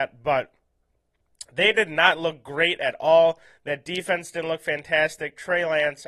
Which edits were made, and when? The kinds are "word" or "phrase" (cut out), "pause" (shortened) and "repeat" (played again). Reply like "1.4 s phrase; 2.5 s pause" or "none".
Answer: none